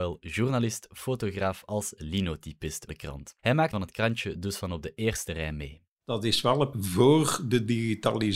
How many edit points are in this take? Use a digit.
4